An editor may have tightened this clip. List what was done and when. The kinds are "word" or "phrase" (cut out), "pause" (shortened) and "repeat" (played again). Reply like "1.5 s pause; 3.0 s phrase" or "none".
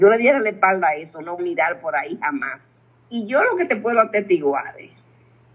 1.4 s word